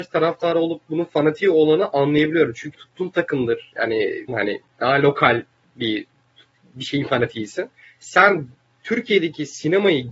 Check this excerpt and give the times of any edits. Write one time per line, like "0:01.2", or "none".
0:02.7
0:04.3
0:07.8